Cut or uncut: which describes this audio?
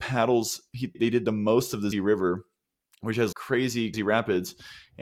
cut